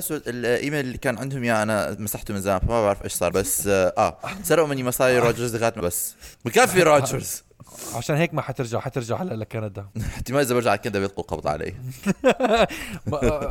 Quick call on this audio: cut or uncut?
cut